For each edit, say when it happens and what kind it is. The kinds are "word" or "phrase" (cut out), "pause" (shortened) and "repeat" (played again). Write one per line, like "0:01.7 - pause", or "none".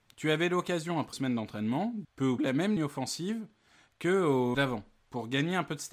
0:01.1 - word
0:02.0 - word
0:02.4 - word
0:02.8 - word
0:04.5 - word